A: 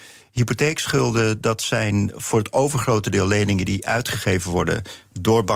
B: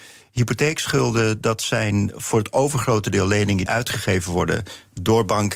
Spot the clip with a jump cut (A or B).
B